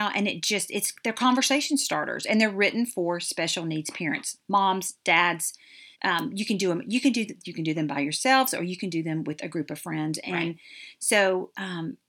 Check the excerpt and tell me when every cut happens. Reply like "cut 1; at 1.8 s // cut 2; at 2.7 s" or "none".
cut 1; at 5.9 s